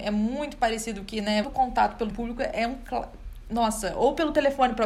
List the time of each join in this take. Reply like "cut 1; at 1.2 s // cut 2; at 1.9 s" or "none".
cut 1; at 1.4 s // cut 2; at 2.1 s